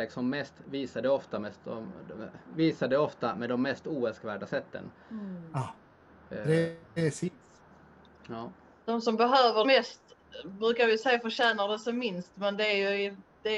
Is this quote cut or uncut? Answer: cut